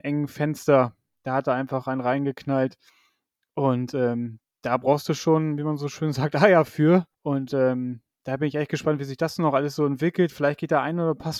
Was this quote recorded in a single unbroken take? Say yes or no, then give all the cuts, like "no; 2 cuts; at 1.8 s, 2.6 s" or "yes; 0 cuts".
no; 1 cut; at 7.1 s